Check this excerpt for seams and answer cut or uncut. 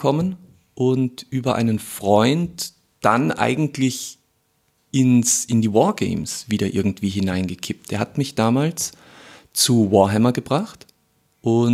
uncut